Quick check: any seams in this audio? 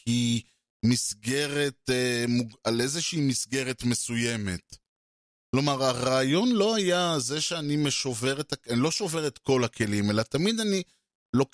no; 0 cuts

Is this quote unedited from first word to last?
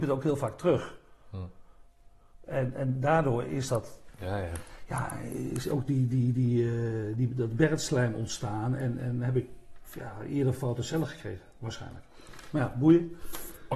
yes; 0 cuts

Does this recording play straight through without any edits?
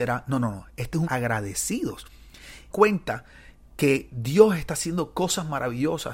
no; 2 cuts; at 1.0 s, 2.7 s

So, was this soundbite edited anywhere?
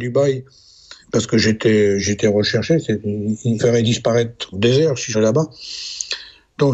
yes; 4 cuts; at 1.0 s, 3.6 s, 4.5 s, 5.1 s

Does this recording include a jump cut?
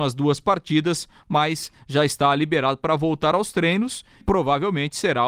yes; 1 cut; at 4.2 s

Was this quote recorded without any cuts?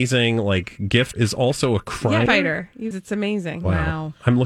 no; 3 cuts; at 1.1 s, 2.3 s, 2.9 s

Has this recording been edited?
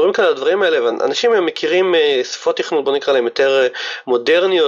no; 0 cuts

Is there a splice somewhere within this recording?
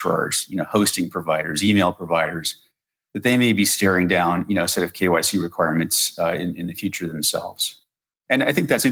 no; 0 cuts

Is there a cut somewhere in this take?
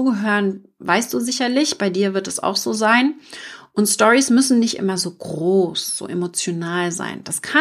no; 0 cuts

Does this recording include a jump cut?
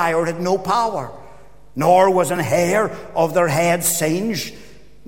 no; 0 cuts

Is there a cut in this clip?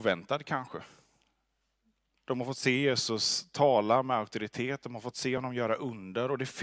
no; 0 cuts

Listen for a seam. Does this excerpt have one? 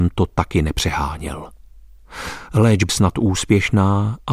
yes; 1 cut; at 2.9 s

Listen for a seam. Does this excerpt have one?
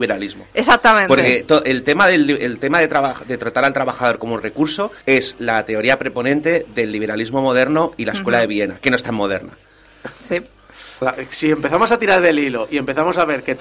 yes; 2 cuts; at 5.0 s, 11.0 s

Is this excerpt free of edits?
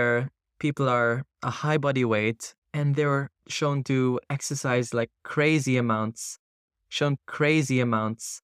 no; 3 cuts; at 2.6 s, 3.4 s, 7.2 s

